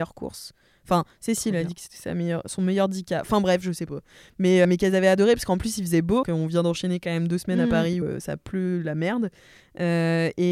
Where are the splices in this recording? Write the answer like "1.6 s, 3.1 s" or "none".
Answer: 4.6 s, 6.2 s, 8.0 s